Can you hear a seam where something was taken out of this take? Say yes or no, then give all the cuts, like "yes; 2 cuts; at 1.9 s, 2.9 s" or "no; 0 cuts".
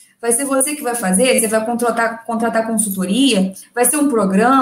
no; 0 cuts